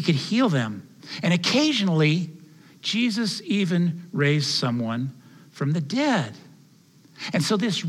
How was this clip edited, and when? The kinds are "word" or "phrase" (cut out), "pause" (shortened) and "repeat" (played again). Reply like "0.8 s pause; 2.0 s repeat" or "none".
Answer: none